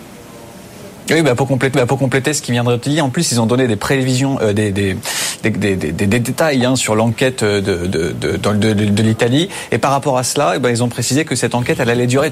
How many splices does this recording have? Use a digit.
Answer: 1